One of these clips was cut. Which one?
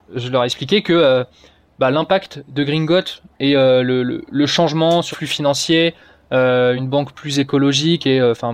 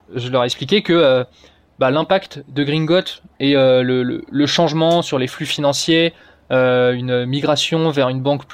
first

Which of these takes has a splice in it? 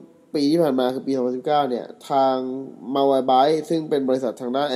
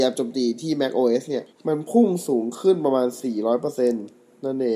second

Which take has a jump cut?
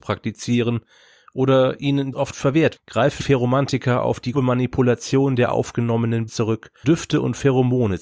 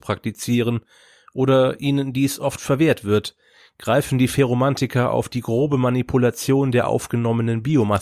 first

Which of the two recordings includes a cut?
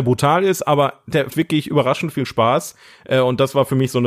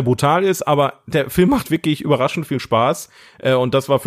first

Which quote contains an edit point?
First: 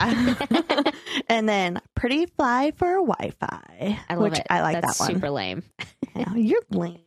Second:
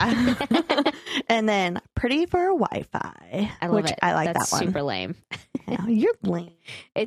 second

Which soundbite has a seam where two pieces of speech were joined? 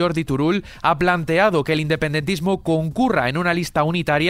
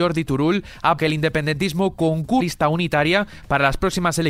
second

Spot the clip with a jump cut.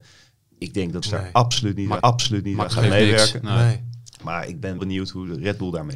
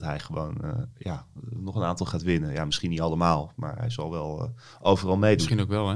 first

